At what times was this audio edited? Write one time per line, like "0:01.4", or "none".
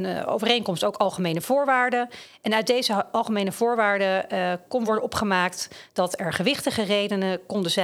none